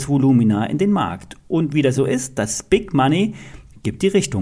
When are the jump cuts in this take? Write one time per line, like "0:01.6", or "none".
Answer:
0:01.9

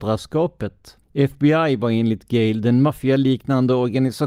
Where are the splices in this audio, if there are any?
0:01.0

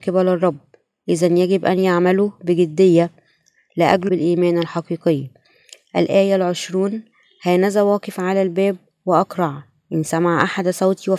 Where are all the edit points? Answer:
0:04.1

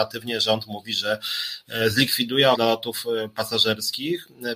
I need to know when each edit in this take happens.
0:02.5

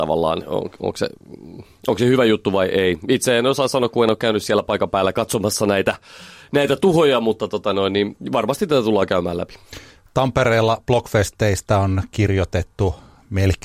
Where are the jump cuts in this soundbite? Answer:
none

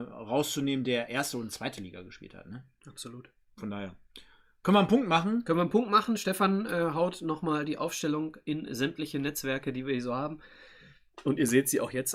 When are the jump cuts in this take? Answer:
none

